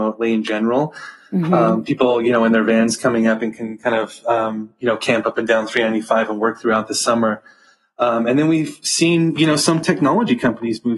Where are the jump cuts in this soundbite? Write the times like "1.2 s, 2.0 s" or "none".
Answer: none